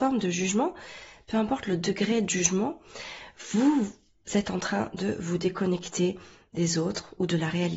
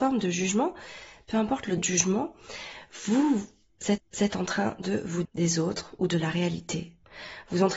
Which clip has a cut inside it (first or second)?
second